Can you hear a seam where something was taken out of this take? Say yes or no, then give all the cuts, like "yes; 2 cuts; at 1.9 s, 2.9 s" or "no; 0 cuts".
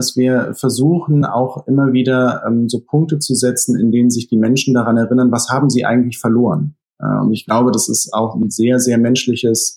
no; 0 cuts